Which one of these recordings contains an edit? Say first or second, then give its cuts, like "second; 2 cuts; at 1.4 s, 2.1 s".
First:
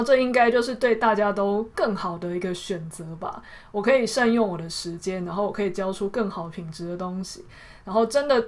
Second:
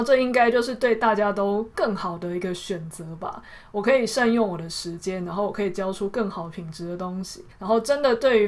second; 1 cut; at 7.5 s